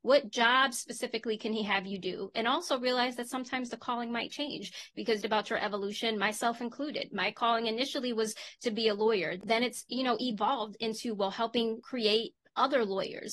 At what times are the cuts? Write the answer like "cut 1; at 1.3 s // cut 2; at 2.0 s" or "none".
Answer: cut 1; at 5.2 s